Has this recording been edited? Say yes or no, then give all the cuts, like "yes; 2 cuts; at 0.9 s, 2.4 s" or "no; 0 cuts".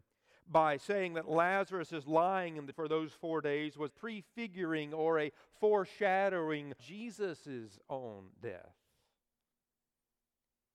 yes; 3 cuts; at 2.7 s, 3.9 s, 6.8 s